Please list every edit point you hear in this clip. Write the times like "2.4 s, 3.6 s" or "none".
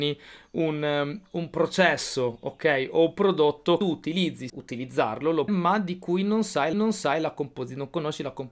3.8 s, 4.5 s, 5.5 s, 6.7 s

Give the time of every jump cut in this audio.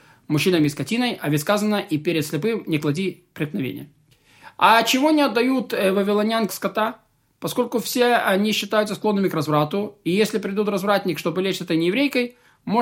3.3 s, 6.5 s

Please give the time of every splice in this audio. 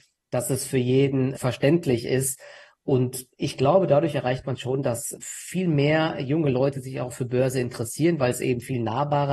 none

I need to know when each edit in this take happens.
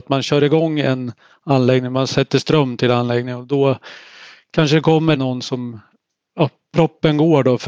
none

